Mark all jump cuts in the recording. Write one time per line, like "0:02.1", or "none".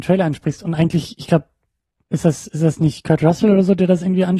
none